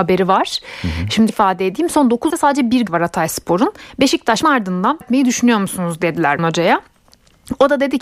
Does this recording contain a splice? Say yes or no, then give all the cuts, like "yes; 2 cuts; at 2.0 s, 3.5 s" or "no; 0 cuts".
yes; 6 cuts; at 1.3 s, 2.3 s, 2.9 s, 4.4 s, 5.0 s, 6.4 s